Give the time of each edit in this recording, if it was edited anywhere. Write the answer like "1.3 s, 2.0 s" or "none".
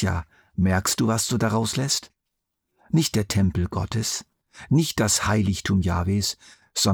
none